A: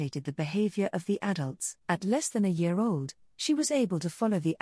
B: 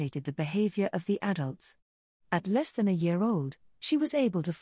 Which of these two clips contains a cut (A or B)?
A